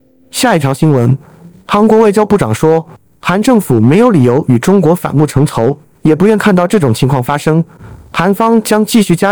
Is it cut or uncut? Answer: uncut